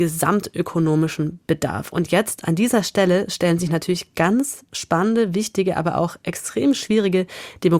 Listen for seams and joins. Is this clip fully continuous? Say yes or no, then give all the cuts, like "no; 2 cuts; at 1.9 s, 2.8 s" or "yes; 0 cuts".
yes; 0 cuts